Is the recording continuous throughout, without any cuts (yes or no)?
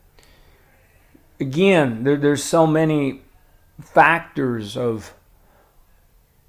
yes